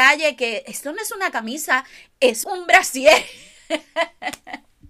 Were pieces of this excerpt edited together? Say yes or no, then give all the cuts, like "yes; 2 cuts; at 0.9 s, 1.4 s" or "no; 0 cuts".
yes; 1 cut; at 2.4 s